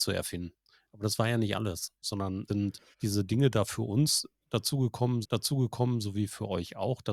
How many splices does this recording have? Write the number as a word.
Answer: four